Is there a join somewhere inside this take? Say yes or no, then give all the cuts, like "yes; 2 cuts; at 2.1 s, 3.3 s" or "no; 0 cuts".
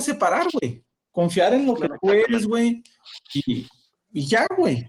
no; 0 cuts